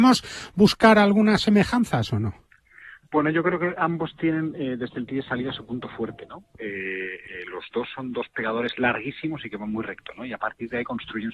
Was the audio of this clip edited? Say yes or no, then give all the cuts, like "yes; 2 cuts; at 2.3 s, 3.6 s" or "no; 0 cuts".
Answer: no; 0 cuts